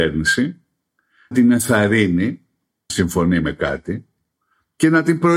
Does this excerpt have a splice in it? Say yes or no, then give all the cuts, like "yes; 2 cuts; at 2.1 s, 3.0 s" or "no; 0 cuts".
yes; 2 cuts; at 1.3 s, 2.9 s